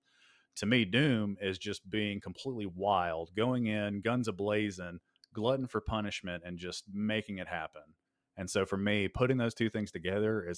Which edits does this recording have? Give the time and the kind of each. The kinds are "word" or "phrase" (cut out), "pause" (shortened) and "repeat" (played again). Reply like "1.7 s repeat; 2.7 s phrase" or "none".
none